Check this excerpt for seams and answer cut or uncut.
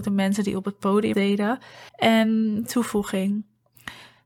cut